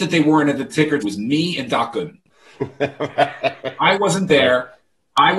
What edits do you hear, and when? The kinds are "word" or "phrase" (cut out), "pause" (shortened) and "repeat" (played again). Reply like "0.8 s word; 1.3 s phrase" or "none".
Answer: 1.0 s phrase